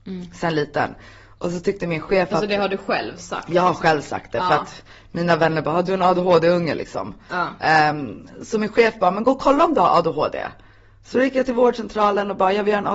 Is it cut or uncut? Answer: uncut